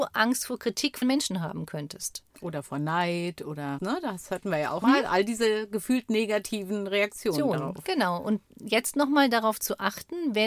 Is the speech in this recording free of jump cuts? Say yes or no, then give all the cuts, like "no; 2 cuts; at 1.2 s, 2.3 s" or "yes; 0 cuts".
no; 4 cuts; at 1.0 s, 2.3 s, 3.8 s, 4.8 s